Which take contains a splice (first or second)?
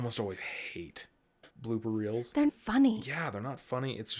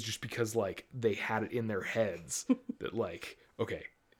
first